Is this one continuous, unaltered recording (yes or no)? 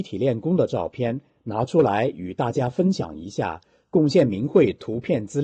yes